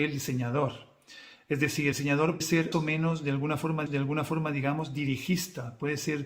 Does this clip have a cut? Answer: yes; 4 cuts; at 1.9 s, 2.4 s, 2.7 s, 3.9 s

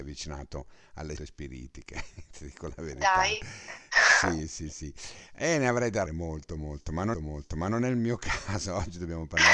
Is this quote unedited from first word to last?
no; 3 cuts; at 1.2 s, 6.1 s, 7.1 s

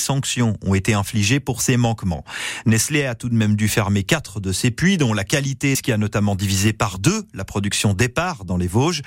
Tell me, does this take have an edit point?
yes; 1 cut; at 5.7 s

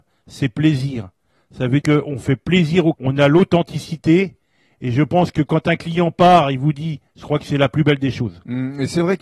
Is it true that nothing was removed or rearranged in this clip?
no; 3 cuts; at 1.8 s, 2.9 s, 7.1 s

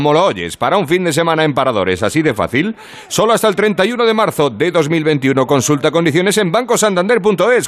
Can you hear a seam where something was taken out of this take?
no; 0 cuts

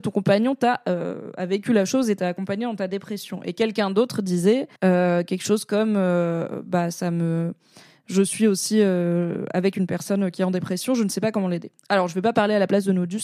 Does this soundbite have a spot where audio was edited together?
yes; 1 cut; at 4.8 s

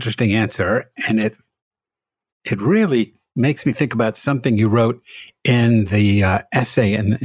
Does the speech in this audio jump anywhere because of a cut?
no; 0 cuts

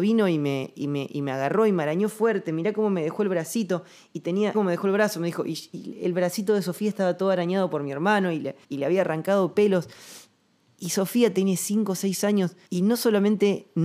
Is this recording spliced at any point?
yes; 3 cuts; at 4.5 s, 8.6 s, 12.7 s

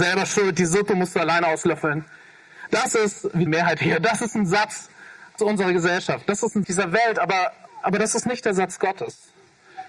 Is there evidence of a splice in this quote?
yes; 4 cuts; at 3.5 s, 5.4 s, 6.6 s, 7.7 s

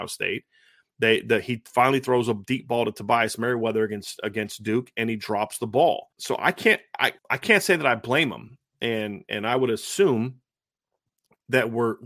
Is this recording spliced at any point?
yes; 2 cuts; at 6.1 s, 7.2 s

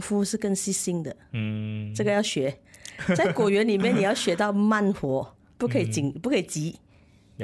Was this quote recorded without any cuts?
yes; 0 cuts

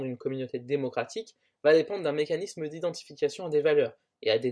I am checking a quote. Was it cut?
no; 0 cuts

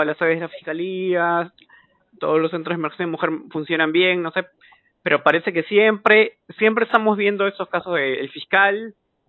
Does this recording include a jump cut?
no; 0 cuts

